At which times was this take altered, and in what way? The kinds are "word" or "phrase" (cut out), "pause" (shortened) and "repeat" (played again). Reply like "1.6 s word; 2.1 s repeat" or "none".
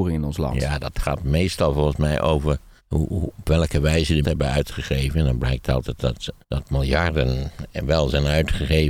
2.8 s pause; 4.2 s phrase; 6.4 s pause

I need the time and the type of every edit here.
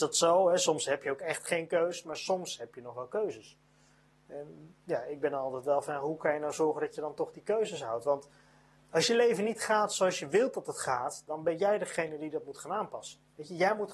8.8 s word

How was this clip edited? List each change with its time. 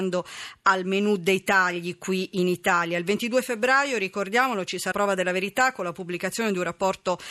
4.9 s word

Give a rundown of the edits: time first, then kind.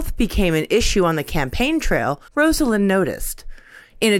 2.3 s pause

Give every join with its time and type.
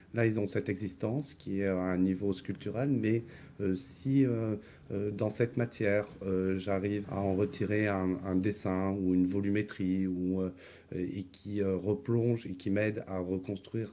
7.0 s word

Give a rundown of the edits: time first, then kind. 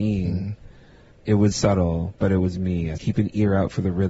1.5 s word; 3.0 s word

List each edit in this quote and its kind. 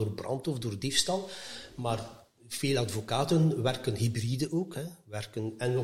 none

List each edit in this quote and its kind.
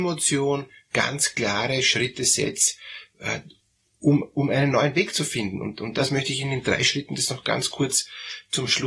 none

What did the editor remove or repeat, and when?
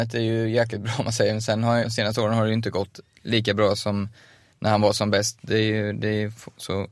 1.8 s word

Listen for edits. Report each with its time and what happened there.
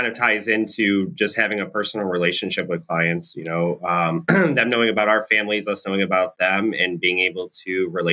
none

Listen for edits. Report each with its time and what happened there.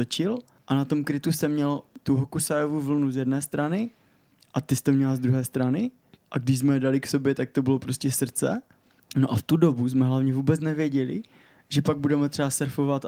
none

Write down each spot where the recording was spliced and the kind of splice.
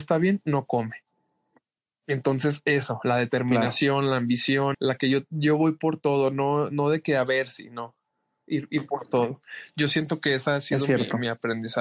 4.7 s word

